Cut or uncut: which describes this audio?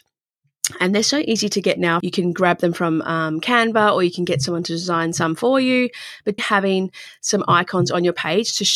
cut